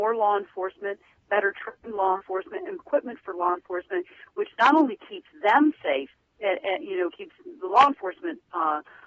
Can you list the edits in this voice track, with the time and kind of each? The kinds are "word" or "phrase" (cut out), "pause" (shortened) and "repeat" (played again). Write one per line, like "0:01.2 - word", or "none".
0:02.8 - word